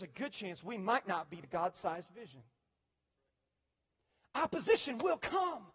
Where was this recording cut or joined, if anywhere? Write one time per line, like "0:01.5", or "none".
0:01.4